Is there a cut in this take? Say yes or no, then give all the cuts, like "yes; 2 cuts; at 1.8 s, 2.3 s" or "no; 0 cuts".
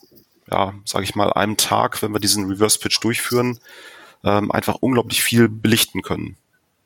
no; 0 cuts